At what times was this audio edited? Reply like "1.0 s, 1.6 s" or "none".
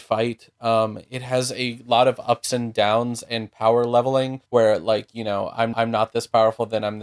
4.5 s, 5.7 s

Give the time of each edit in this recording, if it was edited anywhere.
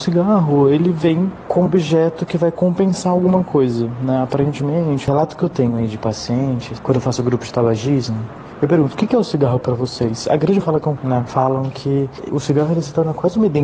1.7 s, 10.6 s, 11.0 s

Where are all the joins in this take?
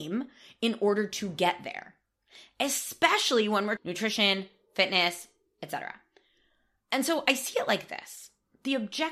3.8 s

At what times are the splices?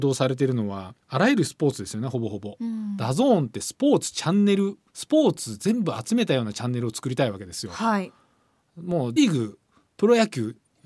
1.0 s, 4.9 s, 9.2 s

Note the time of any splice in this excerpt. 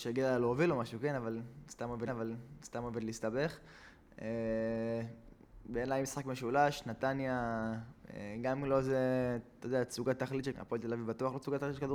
2.1 s, 10.5 s

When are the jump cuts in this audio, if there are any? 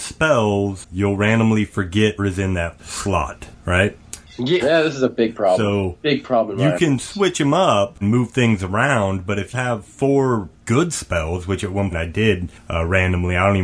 2.2 s, 2.8 s, 4.6 s, 8.0 s, 9.5 s, 11.9 s

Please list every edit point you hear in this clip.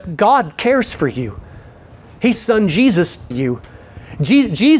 2.3 s, 3.3 s

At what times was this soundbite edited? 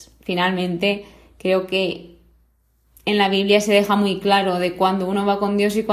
none

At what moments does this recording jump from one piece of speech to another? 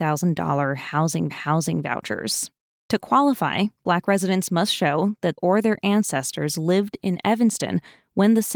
1.3 s, 5.4 s

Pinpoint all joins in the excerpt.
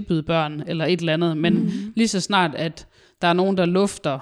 none

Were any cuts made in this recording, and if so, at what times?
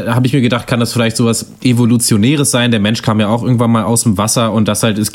1.6 s

